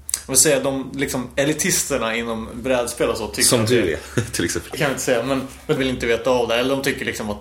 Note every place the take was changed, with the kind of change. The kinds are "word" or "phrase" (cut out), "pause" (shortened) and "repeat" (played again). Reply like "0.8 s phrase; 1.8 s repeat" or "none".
4.7 s phrase; 5.8 s word

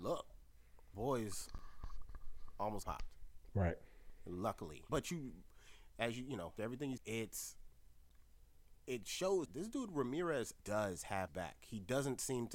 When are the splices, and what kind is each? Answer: 0.9 s word; 2.8 s word; 4.9 s word; 6.6 s word; 7.0 s word; 9.5 s word; 10.6 s word; 11.3 s word

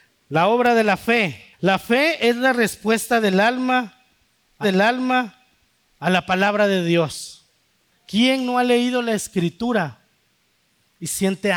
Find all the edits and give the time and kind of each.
1.5 s pause; 4.6 s repeat; 7.7 s pause

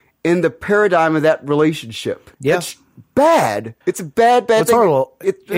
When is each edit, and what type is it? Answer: 2.3 s pause; 3.8 s pause

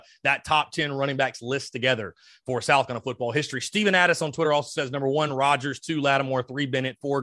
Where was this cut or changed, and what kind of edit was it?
none

